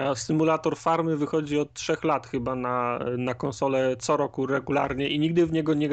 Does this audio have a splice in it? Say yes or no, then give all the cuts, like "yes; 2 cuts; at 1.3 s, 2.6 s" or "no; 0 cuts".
no; 0 cuts